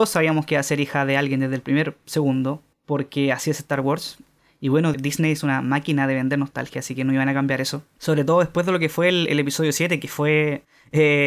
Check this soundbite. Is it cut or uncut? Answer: uncut